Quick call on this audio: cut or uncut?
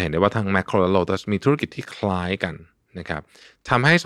uncut